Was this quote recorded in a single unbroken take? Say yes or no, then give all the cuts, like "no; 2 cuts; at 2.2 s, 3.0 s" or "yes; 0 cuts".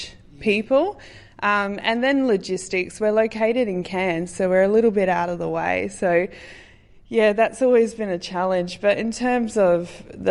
yes; 0 cuts